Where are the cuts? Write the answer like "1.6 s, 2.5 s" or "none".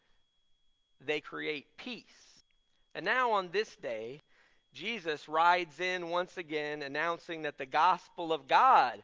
1.2 s, 2.4 s